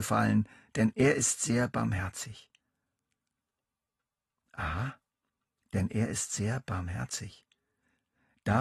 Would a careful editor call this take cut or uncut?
uncut